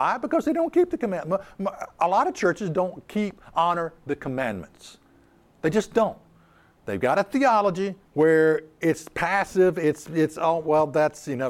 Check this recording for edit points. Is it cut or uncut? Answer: cut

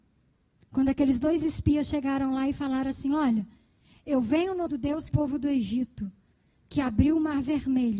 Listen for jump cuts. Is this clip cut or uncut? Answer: cut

